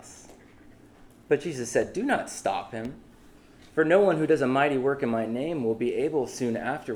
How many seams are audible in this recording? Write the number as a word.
zero